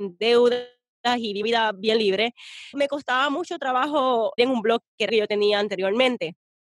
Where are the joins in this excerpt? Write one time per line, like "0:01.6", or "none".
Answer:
0:01.4
0:02.7
0:04.4
0:05.1